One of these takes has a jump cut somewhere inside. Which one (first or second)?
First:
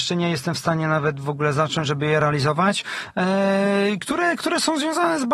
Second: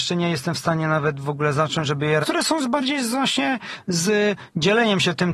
second